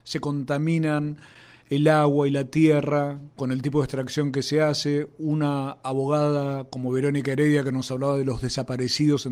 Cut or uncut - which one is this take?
uncut